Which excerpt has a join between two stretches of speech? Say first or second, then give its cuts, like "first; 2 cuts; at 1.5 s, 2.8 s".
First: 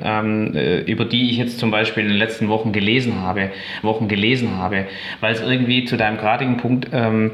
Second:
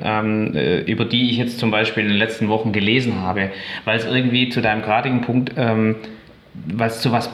first; 1 cut; at 3.8 s